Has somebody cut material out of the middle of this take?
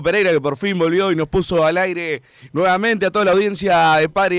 no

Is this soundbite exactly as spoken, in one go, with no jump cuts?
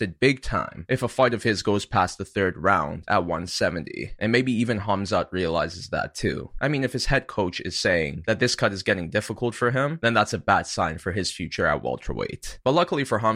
yes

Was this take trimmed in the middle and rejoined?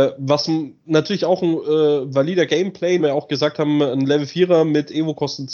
yes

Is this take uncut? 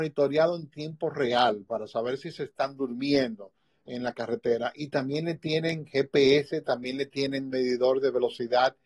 yes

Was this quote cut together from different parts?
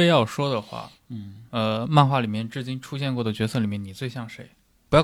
no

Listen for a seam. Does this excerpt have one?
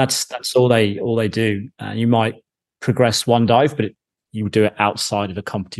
no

